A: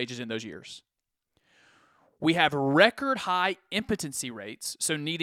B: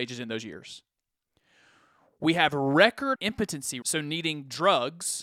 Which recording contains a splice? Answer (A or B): B